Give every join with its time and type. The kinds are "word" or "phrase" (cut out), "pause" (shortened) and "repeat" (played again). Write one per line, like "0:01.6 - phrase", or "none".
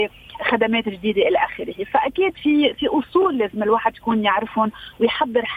none